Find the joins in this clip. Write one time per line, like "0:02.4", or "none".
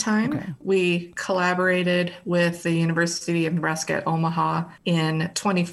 0:04.8